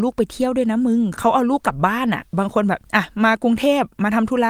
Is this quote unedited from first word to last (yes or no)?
no